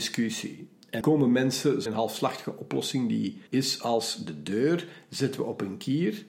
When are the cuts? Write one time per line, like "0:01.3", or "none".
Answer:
0:01.0
0:01.9
0:03.5